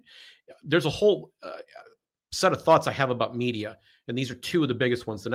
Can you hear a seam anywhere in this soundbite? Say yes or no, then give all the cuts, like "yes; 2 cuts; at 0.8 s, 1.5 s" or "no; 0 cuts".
no; 0 cuts